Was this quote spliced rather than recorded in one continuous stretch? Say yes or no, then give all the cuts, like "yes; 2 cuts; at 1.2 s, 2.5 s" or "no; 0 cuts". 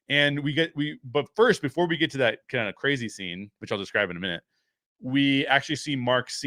no; 0 cuts